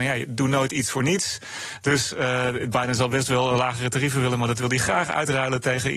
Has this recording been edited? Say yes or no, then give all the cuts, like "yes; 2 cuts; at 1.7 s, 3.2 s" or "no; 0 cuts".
no; 0 cuts